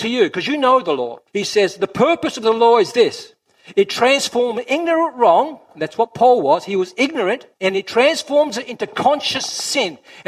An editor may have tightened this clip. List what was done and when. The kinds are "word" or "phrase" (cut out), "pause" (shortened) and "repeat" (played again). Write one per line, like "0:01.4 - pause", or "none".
0:01.3 - pause
0:07.5 - pause